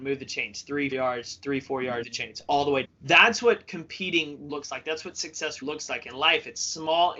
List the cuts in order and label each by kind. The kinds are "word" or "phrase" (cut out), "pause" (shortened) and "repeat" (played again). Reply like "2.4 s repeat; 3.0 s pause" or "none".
0.9 s word; 2.0 s word; 2.8 s word; 4.5 s word; 5.6 s word

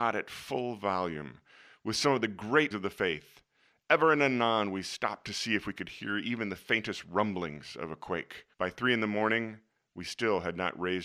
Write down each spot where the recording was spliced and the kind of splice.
2.7 s word; 8.5 s pause

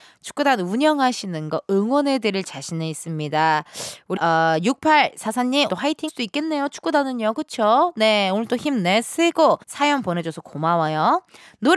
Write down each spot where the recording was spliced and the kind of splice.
4.2 s word; 5.7 s word; 6.1 s phrase; 9.6 s pause

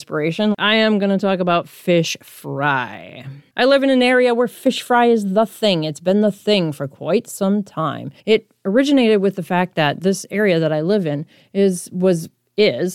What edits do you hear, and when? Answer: 8.2 s pause

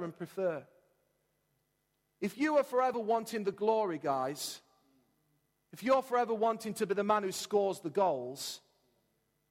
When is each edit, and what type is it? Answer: none

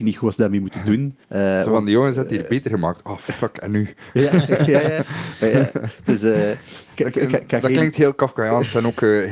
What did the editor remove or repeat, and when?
1.2 s pause

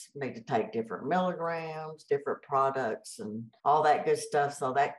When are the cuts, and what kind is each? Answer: 3.6 s pause

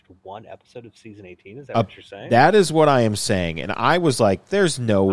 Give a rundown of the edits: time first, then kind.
none

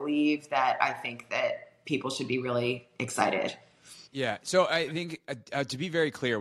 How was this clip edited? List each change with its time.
4.1 s pause

